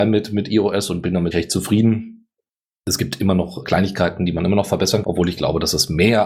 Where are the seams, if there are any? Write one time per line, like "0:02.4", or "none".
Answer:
0:01.3
0:03.6
0:05.0